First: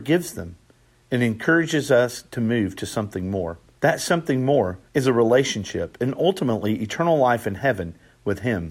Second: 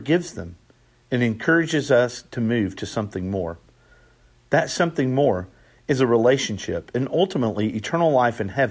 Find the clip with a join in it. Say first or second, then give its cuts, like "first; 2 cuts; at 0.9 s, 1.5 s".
first; 2 cuts; at 3.7 s, 4.9 s